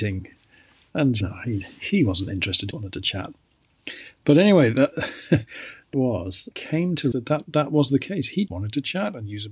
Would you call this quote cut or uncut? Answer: cut